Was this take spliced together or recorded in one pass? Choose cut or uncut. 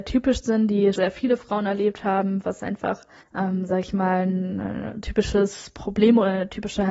cut